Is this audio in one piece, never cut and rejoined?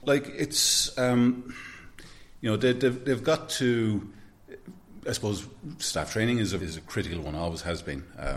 no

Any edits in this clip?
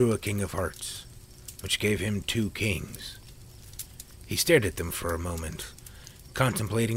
no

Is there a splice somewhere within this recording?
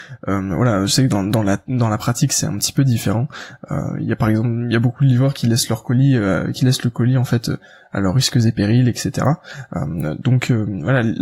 no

